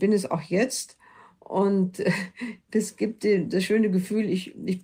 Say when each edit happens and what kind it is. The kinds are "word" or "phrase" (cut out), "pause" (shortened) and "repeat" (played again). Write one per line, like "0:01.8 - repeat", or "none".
none